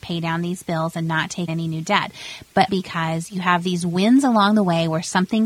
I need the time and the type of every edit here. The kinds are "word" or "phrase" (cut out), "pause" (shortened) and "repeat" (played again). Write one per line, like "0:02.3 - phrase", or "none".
0:01.5 - word
0:02.7 - word